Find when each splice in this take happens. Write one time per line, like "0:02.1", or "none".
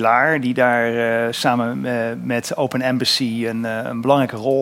none